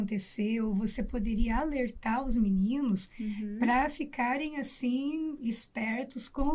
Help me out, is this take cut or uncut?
uncut